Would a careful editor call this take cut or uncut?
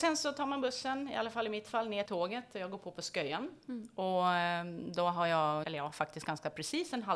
cut